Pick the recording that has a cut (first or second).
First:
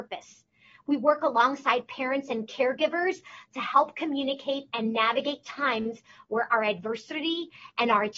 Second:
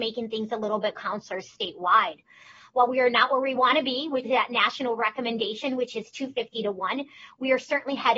second